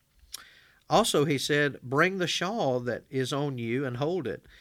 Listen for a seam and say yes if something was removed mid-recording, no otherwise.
no